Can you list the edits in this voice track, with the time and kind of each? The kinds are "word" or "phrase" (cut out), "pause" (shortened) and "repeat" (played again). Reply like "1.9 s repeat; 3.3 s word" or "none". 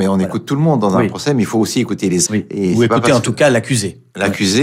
2.3 s word